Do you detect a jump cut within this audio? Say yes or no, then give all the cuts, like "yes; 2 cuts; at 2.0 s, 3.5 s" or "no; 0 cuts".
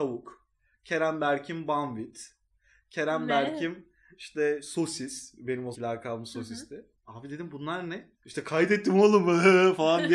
yes; 2 cuts; at 5.7 s, 8.2 s